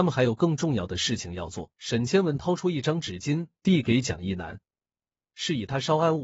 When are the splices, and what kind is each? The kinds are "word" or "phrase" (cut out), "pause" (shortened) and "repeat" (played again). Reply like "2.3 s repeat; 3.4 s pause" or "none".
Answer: 1.7 s pause

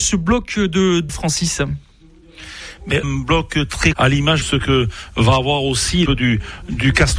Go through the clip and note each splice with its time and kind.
1.1 s word; 3.0 s word; 3.9 s word; 4.4 s word; 6.1 s word

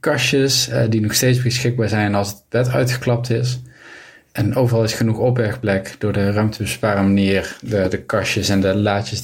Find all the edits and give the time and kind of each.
none

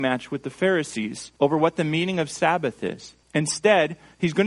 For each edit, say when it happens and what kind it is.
1.4 s pause; 3.2 s pause

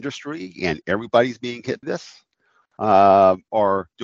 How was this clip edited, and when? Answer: 1.8 s word

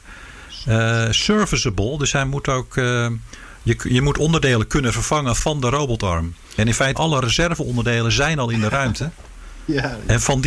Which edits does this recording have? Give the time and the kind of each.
6.9 s word

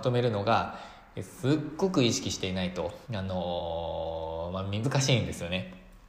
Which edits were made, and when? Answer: 3.0 s pause; 4.8 s phrase

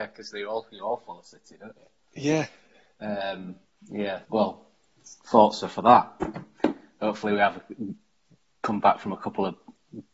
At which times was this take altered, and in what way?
4.2 s word

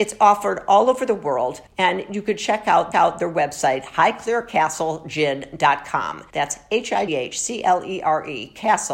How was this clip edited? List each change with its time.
1.7 s pause; 2.9 s repeat; 6.3 s pause; 7.1 s word

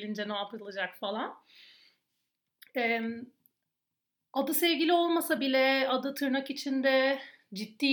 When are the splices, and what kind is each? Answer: none

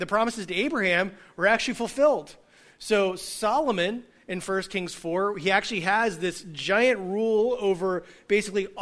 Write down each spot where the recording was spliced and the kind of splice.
none

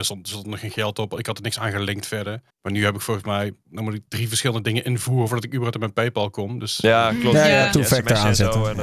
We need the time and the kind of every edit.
2.5 s pause; 4.1 s pause

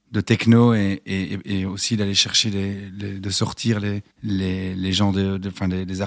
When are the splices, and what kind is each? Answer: 4.1 s pause

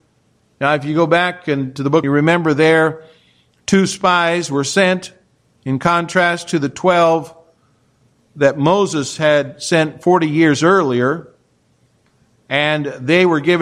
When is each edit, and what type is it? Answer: 2.0 s phrase; 5.4 s pause

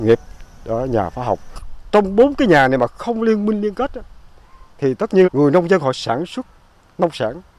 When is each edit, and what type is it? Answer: 4.7 s pause; 5.2 s word

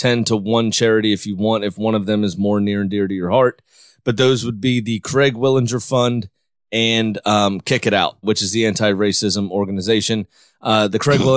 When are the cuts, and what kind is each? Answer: 8.2 s word

